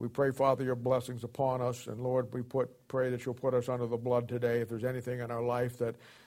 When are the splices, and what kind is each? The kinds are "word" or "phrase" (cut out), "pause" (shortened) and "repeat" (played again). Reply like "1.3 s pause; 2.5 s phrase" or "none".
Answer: none